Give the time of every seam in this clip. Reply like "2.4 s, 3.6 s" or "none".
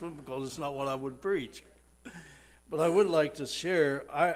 none